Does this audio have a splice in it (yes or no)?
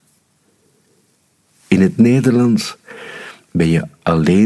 no